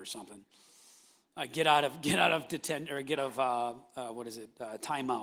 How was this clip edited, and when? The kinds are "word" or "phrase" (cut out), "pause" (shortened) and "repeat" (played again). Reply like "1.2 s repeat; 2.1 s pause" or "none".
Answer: 3.2 s word